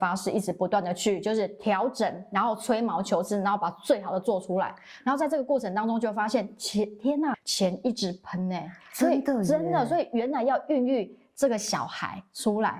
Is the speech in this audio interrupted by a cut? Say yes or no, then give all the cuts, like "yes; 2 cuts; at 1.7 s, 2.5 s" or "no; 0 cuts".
yes; 1 cut; at 7.3 s